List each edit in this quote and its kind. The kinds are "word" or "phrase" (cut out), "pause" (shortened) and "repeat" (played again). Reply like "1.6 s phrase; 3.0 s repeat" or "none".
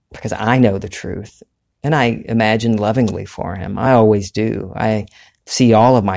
none